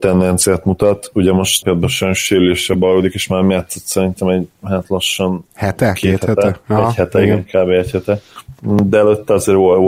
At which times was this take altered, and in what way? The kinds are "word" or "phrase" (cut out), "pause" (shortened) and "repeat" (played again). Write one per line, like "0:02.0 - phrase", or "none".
0:01.6 - word
0:05.5 - pause